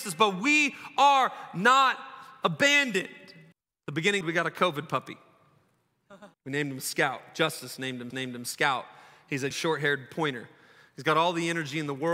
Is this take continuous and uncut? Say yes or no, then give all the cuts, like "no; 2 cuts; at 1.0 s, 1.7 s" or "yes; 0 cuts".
no; 5 cuts; at 3.5 s, 4.2 s, 6.3 s, 8.1 s, 9.5 s